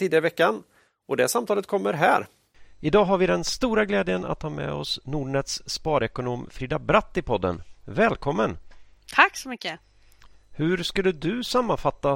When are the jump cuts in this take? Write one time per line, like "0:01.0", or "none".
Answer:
none